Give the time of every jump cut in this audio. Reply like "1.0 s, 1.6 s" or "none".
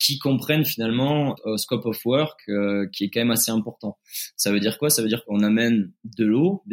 5.2 s